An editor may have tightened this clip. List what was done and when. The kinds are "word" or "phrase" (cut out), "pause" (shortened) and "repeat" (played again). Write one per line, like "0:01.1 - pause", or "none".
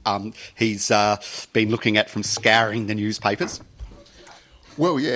none